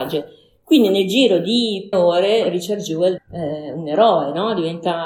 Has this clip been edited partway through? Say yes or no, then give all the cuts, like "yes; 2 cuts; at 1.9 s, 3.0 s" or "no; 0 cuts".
yes; 2 cuts; at 1.9 s, 3.2 s